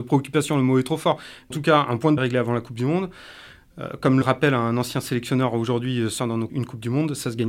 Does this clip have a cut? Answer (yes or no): yes